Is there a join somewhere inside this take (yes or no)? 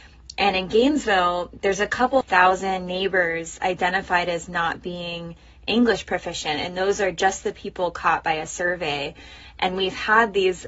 no